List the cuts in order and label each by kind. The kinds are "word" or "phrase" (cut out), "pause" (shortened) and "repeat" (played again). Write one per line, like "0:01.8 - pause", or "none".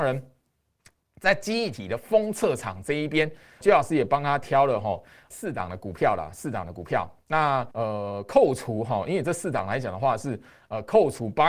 0:03.6 - word
0:05.3 - word
0:07.7 - pause